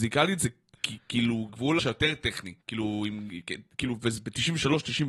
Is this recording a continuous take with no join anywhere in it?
no; 3 cuts; at 1.5 s, 1.8 s, 2.6 s

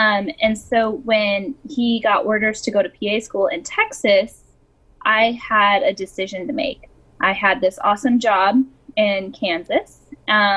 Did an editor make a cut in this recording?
no; 0 cuts

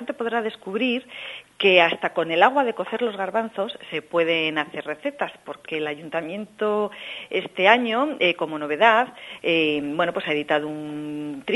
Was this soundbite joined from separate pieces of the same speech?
no; 0 cuts

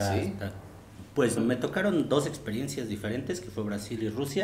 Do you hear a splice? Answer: yes; 1 cut; at 1.4 s

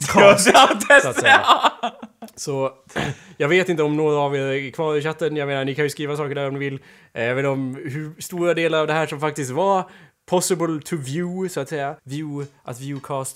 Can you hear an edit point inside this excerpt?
yes; 1 cut; at 12.0 s

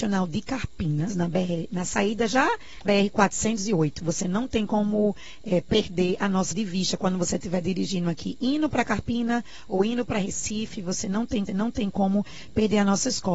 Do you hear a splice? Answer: yes; 4 cuts; at 1.1 s, 2.8 s, 6.5 s, 11.5 s

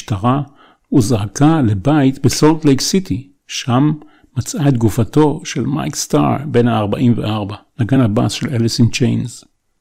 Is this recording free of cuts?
yes; 0 cuts

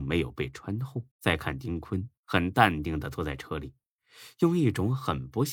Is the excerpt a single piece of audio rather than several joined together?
no; 2 cuts; at 1.1 s, 2.2 s

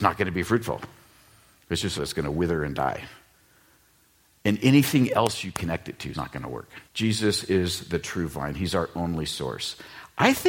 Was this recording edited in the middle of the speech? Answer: yes; 3 cuts; at 2.0 s, 6.1 s, 6.9 s

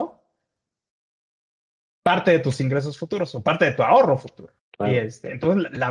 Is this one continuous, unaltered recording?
no; 1 cut; at 4.6 s

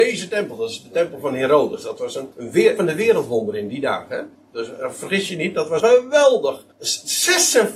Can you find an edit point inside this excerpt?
yes; 5 cuts; at 2.3 s, 2.8 s, 4.4 s, 5.8 s, 6.7 s

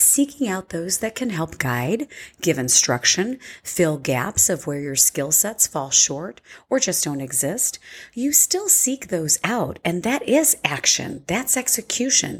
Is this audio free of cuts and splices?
yes; 0 cuts

